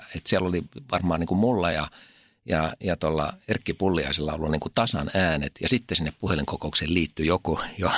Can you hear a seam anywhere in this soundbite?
no; 0 cuts

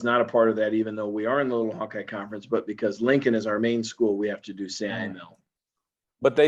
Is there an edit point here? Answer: no; 0 cuts

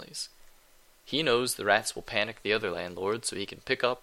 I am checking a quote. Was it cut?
no; 0 cuts

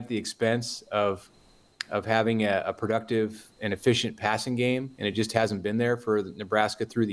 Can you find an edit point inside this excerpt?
no; 0 cuts

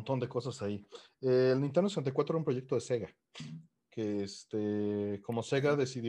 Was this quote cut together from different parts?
no; 0 cuts

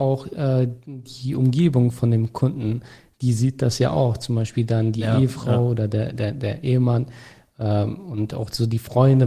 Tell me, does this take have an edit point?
no; 0 cuts

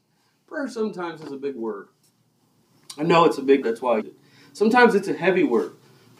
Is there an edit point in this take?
yes; 2 cuts; at 3.6 s, 4.0 s

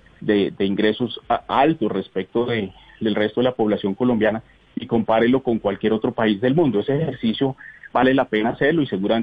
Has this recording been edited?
no; 0 cuts

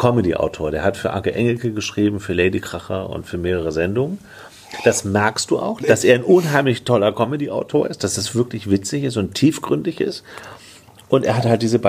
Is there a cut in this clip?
yes; 1 cut; at 5.8 s

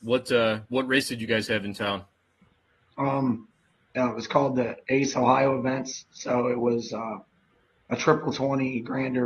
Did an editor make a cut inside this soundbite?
no; 0 cuts

